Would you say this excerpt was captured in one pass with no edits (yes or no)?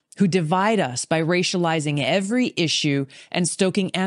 yes